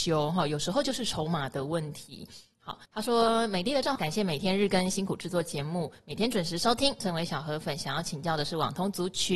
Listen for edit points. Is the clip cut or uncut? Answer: cut